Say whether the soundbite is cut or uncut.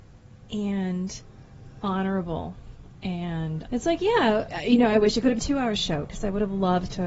cut